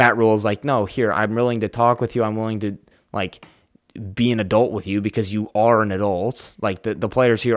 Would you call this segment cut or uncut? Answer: uncut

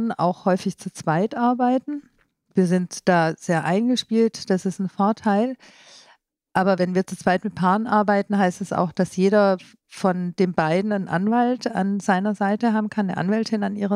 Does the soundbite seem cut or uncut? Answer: uncut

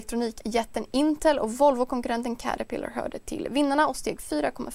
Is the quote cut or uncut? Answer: uncut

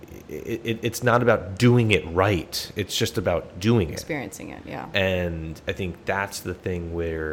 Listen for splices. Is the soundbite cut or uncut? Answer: uncut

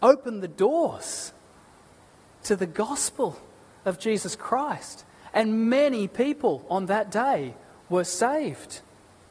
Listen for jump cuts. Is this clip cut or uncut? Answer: uncut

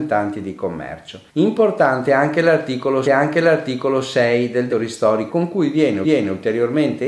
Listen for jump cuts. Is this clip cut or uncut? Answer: cut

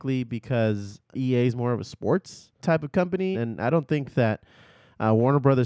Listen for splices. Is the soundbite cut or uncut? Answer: cut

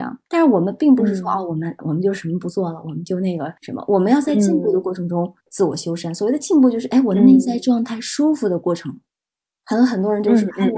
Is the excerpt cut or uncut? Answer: cut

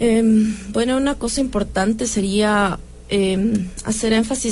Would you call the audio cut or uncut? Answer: uncut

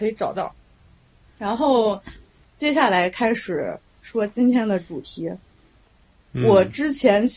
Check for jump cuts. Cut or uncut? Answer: cut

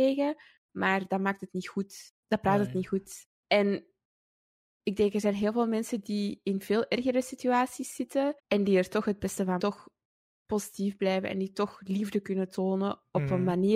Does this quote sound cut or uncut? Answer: cut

